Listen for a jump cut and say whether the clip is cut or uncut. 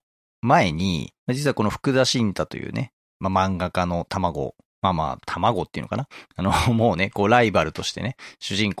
cut